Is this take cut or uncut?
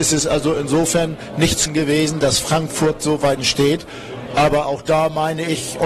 cut